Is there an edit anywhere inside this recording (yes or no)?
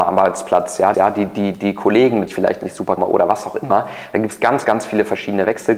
yes